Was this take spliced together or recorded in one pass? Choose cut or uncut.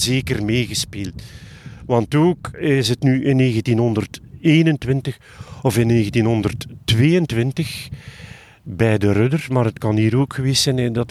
uncut